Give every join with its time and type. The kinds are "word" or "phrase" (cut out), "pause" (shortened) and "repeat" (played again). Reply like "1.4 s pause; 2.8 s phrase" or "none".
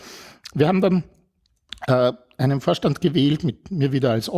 none